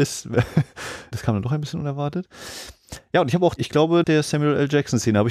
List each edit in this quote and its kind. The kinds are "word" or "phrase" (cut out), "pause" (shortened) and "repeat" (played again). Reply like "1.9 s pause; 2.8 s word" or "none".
1.1 s word; 3.6 s word; 4.0 s word